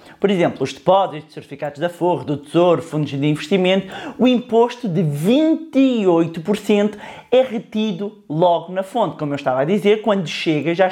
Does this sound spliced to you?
no; 0 cuts

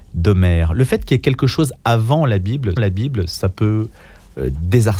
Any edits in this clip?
yes; 1 cut; at 2.8 s

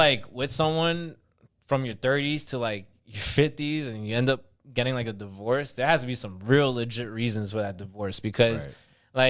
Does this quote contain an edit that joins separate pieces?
no; 0 cuts

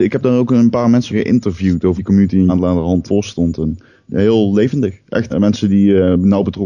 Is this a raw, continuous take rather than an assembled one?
no; 6 cuts; at 1.1 s, 2.0 s, 2.5 s, 3.1 s, 4.1 s, 5.3 s

